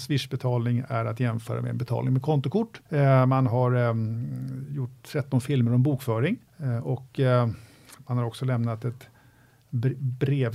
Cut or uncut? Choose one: cut